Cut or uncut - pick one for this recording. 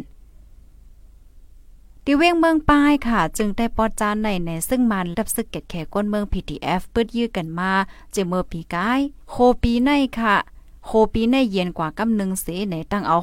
cut